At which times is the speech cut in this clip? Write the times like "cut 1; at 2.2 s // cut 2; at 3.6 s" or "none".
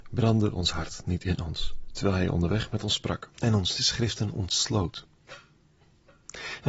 cut 1; at 3.3 s